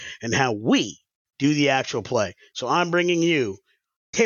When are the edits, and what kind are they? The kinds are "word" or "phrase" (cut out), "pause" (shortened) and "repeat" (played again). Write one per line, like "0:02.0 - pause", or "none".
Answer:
0:01.2 - pause